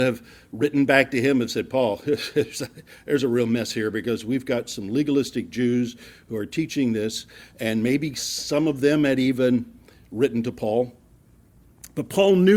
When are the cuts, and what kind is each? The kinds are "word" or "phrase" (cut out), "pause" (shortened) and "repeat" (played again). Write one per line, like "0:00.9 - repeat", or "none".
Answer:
none